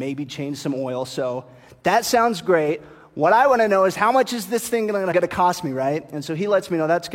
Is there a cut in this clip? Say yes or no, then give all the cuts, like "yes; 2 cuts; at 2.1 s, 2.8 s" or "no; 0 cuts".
yes; 1 cut; at 5.1 s